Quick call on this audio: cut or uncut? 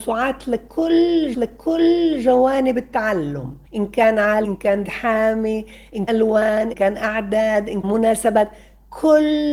cut